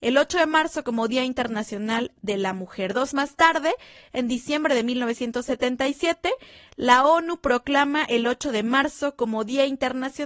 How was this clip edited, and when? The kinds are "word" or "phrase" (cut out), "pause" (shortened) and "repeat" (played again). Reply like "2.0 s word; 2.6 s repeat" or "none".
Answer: 3.1 s word